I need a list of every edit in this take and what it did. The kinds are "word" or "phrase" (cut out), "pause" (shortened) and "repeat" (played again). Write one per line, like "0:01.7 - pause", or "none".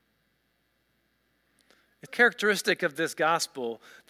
0:02.1 - word

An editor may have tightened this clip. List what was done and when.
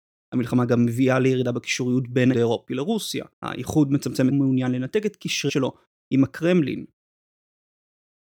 0:02.3 - word
0:03.3 - pause
0:04.3 - phrase
0:05.5 - word

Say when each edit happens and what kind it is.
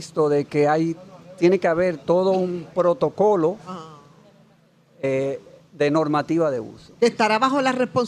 none

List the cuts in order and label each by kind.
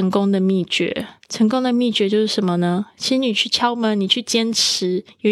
0:01.2 - pause

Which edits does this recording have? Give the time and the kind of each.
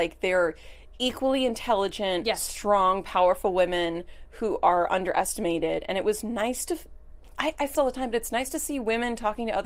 0:07.7 - phrase

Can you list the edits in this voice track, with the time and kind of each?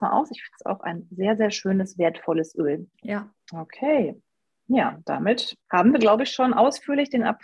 0:02.9 - pause
0:05.6 - pause

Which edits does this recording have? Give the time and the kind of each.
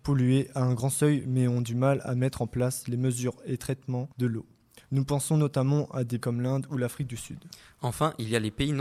0:04.1 - pause
0:06.2 - word

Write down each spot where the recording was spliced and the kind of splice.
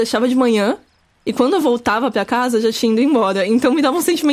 none

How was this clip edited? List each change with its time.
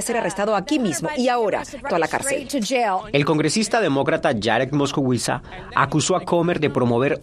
0:01.9 - phrase

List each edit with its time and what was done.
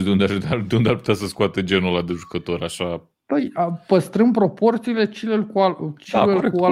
none

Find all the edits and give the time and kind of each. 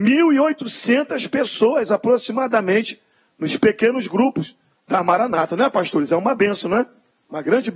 none

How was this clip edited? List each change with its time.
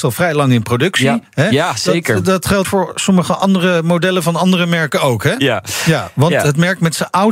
0:02.6 - word

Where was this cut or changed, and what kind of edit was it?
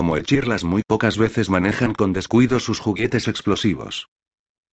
none

